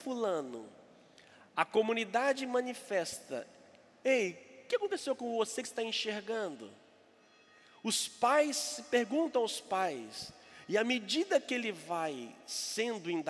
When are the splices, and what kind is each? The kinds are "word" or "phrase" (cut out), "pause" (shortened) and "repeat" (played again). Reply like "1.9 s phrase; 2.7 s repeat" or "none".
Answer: none